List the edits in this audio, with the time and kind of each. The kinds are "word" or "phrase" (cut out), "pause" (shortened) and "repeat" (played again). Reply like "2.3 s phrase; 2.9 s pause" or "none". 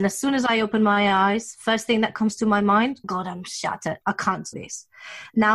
3.0 s word; 4.0 s pause; 4.5 s word